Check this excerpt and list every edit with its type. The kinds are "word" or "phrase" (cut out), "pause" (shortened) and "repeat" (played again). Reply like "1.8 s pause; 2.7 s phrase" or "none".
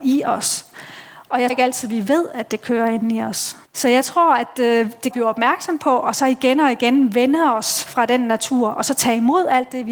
1.5 s word; 3.7 s pause; 5.1 s phrase; 7.9 s word